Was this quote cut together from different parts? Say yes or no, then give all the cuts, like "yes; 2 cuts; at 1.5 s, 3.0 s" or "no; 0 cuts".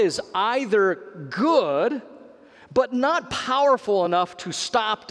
no; 0 cuts